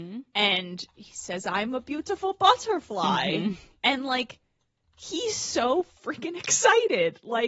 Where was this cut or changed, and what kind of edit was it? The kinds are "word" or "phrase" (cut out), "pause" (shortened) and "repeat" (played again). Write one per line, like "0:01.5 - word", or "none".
none